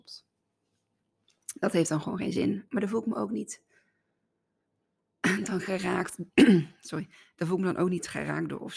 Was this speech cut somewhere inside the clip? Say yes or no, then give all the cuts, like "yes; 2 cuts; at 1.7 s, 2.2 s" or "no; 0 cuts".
no; 0 cuts